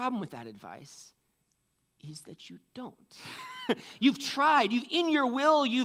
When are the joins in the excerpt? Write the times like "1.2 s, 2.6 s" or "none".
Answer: none